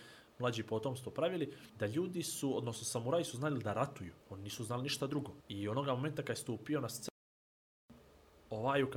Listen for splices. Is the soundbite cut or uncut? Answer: cut